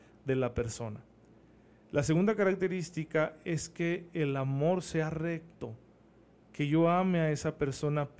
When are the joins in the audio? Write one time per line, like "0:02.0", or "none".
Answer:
none

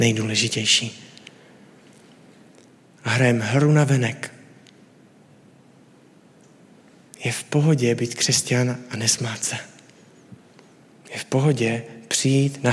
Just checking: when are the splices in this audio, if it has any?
none

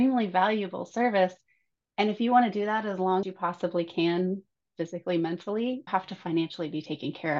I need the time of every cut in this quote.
0:03.2
0:05.9

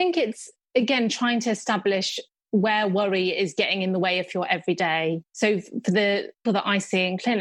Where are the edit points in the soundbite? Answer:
0:06.4

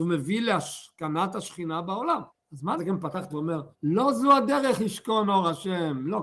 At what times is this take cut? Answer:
0:02.3
0:02.8
0:03.3
0:03.7

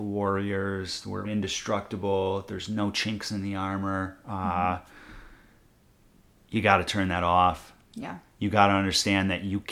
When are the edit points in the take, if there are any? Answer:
0:01.2

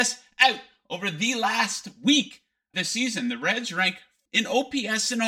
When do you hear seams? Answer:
0:02.7
0:04.3

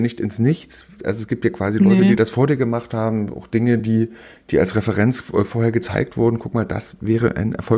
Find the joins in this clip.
none

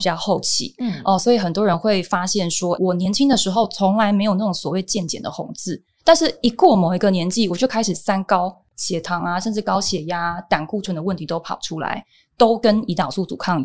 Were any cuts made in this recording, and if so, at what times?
0:02.8

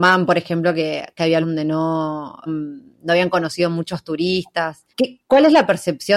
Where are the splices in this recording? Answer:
0:01.4
0:02.5
0:04.9

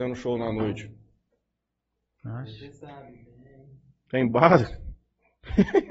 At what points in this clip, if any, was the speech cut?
none

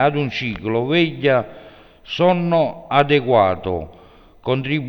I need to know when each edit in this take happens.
none

